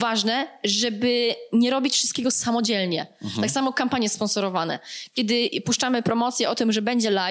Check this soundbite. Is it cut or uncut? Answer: uncut